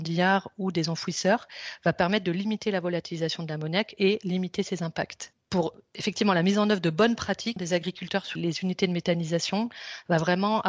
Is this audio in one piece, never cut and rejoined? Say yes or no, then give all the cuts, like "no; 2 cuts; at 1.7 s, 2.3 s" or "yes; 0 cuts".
no; 2 cuts; at 7.6 s, 8.4 s